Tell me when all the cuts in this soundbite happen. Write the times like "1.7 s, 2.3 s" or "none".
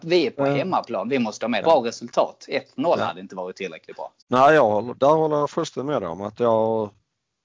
1.6 s, 4.2 s